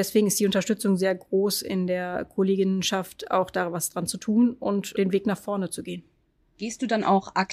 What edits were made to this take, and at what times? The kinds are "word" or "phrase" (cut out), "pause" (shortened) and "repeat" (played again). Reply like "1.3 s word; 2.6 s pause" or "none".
none